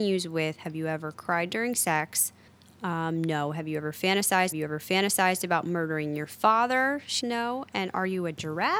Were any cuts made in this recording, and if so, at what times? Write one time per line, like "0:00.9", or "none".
0:02.5
0:04.5
0:07.2